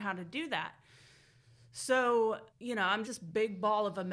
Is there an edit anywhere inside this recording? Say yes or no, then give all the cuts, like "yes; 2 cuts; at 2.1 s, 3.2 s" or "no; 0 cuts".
yes; 2 cuts; at 2.5 s, 3.0 s